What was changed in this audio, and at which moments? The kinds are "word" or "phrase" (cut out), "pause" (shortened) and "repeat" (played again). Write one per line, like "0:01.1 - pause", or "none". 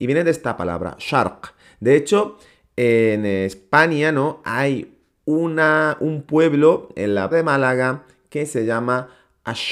0:07.3 - word